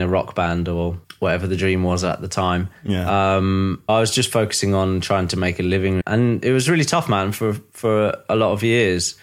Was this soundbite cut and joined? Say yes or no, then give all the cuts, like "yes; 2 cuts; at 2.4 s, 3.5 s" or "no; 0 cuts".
yes; 2 cuts; at 3.9 s, 6.0 s